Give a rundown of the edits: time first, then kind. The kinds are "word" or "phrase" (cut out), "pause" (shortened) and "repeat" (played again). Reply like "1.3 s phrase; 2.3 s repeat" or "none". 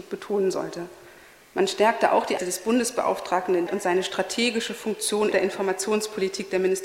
1.2 s pause; 2.4 s word; 3.7 s phrase; 5.3 s word